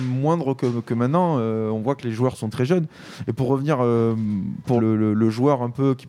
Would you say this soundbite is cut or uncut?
cut